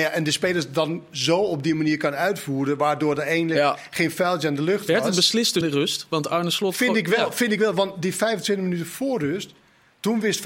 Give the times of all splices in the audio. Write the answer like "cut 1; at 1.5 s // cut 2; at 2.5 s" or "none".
cut 1; at 5.6 s